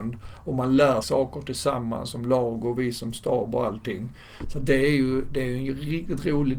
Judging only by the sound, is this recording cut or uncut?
cut